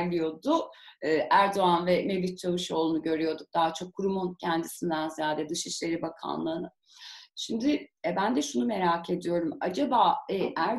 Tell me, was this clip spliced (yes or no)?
no